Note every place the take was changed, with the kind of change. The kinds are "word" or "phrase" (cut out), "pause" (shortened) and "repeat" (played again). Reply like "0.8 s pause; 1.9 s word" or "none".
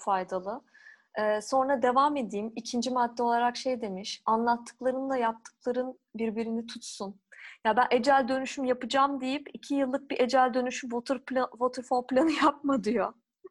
none